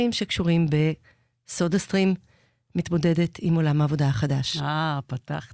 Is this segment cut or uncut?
uncut